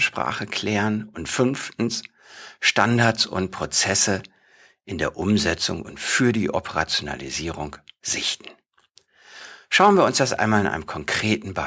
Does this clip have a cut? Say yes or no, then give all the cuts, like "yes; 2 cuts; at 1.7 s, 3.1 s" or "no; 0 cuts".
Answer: no; 0 cuts